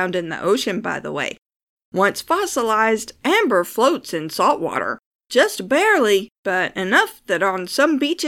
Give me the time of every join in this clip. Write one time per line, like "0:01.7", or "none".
none